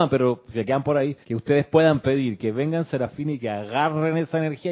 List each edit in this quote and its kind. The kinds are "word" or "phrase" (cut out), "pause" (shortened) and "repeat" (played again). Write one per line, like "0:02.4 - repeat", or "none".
0:01.2 - pause

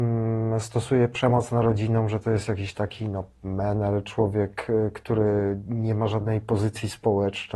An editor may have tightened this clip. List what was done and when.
none

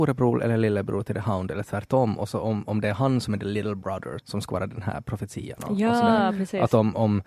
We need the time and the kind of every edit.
0:04.2 - word

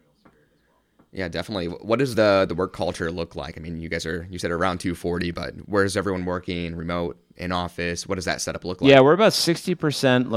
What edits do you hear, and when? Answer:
none

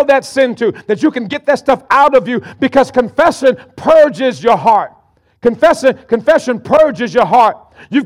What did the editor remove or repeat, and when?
none

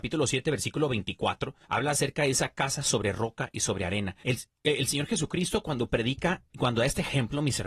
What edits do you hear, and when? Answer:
0:01.6 - pause
0:04.2 - pause
0:06.5 - word

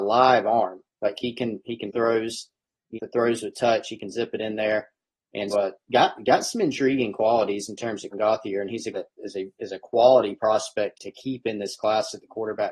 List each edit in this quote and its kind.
0:01.9 - word
0:03.0 - word
0:05.5 - word
0:08.1 - word
0:08.9 - word
0:10.9 - word

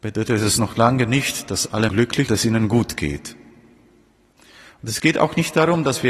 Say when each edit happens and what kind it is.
0:01.9 - word
0:02.3 - phrase

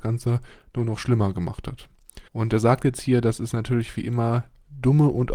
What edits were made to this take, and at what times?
0:02.3 - pause

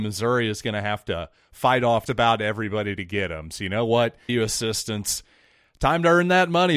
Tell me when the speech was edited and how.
0:02.1 - word
0:04.3 - phrase

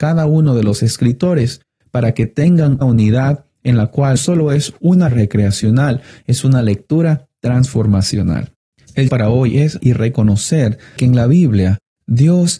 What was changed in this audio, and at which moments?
0:02.8 - word
0:04.2 - word
0:05.1 - word
0:09.1 - word
0:09.8 - word
0:11.0 - word

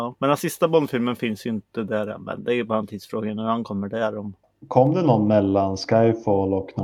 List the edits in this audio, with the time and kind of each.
0:04.4 - pause

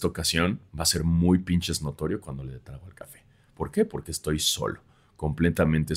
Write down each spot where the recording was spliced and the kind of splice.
none

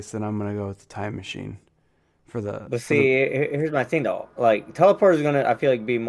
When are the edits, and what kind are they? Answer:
none

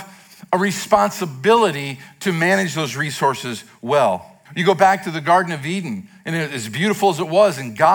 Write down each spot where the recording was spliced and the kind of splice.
0:04.5 - pause

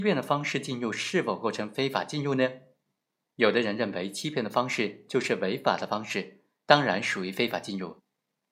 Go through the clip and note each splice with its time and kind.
none

